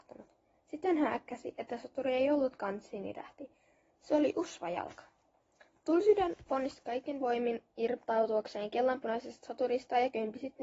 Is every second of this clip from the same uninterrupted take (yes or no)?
yes